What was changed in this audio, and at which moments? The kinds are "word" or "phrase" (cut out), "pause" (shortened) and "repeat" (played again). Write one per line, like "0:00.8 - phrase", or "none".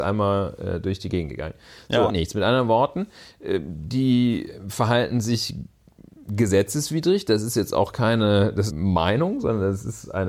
0:02.1 - phrase
0:08.7 - phrase